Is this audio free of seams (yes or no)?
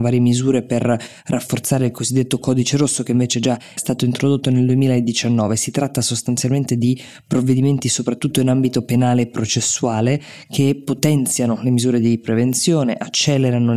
no